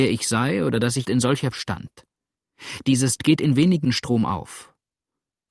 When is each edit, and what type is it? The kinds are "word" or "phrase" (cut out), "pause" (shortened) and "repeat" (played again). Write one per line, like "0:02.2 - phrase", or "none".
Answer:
0:01.0 - word
0:01.5 - word
0:03.2 - word
0:03.8 - word